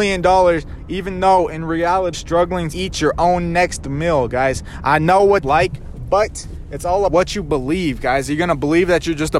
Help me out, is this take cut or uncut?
cut